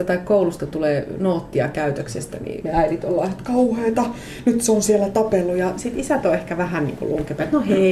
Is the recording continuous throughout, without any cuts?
no; 1 cut; at 2.6 s

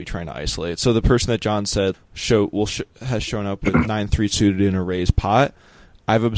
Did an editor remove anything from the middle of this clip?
yes; 1 cut; at 1.9 s

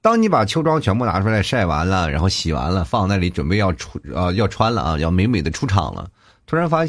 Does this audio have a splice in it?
no; 0 cuts

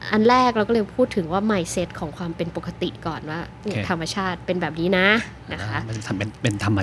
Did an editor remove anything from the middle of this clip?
no; 0 cuts

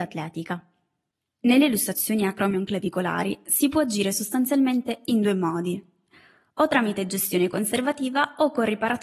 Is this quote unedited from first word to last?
yes; 0 cuts

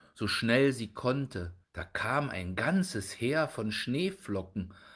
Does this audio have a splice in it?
yes; 1 cut; at 1.6 s

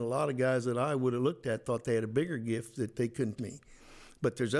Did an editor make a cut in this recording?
yes; 1 cut; at 3.4 s

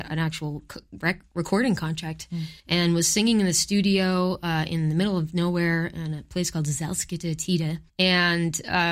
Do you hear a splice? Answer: yes; 2 cuts; at 2.6 s, 7.9 s

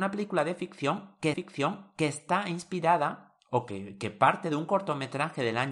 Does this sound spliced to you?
yes; 1 cut; at 1.3 s

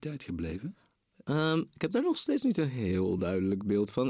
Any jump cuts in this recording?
no; 0 cuts

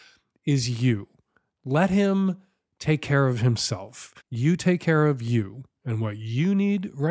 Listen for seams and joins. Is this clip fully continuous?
no; 1 cut; at 4.2 s

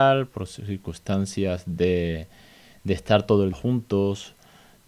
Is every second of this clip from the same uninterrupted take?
no; 1 cut; at 3.5 s

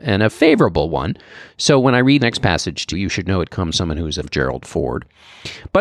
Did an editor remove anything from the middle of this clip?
yes; 4 cuts; at 2.2 s, 2.9 s, 3.7 s, 4.2 s

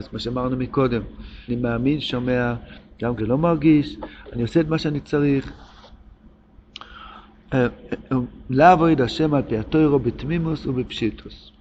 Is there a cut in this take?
yes; 3 cuts; at 1.5 s, 2.0 s, 3.2 s

